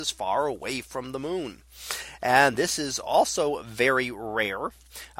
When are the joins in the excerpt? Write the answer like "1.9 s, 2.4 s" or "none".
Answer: none